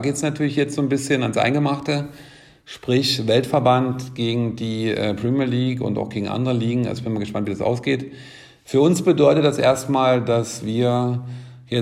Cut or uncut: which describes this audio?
uncut